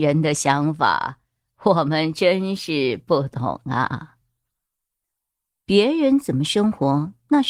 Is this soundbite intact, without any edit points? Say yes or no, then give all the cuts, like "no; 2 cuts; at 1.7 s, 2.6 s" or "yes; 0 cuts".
yes; 0 cuts